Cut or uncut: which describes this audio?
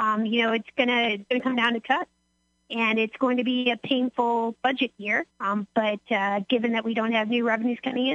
cut